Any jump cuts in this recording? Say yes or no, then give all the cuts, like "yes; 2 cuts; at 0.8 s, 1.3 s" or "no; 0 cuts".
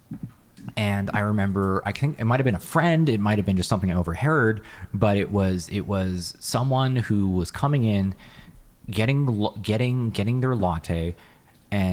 no; 0 cuts